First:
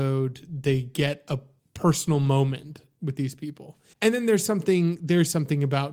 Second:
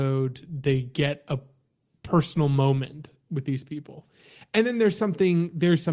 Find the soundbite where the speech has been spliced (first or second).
first